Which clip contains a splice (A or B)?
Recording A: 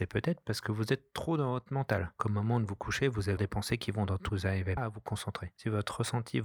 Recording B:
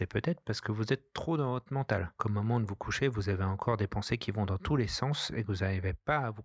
A